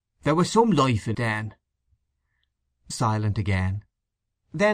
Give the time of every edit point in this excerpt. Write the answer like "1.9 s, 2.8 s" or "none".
1.1 s, 2.9 s